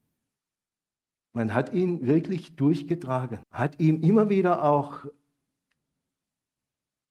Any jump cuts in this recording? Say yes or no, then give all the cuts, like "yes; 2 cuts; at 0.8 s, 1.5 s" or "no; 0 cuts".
yes; 1 cut; at 3.4 s